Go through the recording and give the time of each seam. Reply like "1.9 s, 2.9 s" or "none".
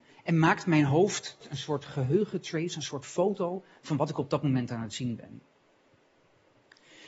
none